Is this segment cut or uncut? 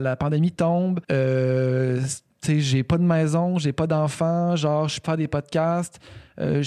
cut